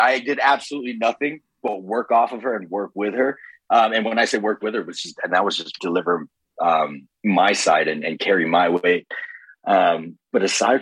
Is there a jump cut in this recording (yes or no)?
yes